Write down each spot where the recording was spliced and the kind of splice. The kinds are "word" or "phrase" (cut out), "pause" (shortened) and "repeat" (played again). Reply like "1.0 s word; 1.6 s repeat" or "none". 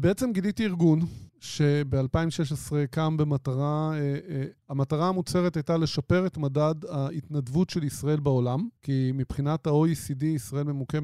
1.3 s pause; 4.6 s pause; 8.8 s pause